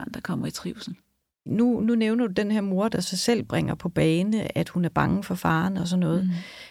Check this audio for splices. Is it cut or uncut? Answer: uncut